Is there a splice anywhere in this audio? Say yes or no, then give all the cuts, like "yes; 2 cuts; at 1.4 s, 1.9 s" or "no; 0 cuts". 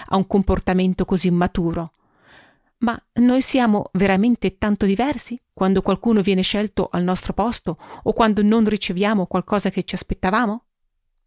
no; 0 cuts